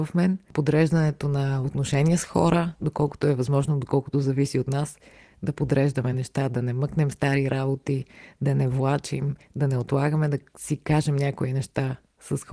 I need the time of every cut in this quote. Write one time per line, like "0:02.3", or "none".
none